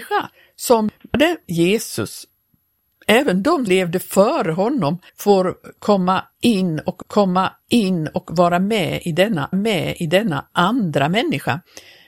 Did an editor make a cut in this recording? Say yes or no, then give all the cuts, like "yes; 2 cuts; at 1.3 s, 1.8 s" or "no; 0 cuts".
yes; 5 cuts; at 1.4 s, 3.7 s, 5.1 s, 7.0 s, 9.5 s